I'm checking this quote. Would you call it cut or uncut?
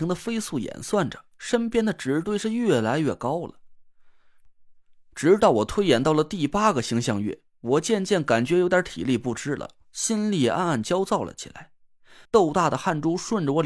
cut